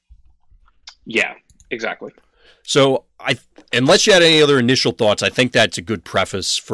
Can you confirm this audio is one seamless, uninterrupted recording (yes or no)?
no